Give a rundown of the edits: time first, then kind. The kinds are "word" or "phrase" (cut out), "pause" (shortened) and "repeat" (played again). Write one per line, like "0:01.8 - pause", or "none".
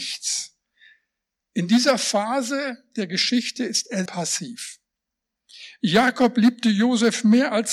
0:04.1 - word